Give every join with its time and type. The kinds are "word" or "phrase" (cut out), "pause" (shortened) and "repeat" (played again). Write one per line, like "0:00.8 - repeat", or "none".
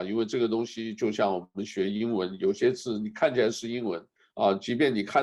0:04.2 - pause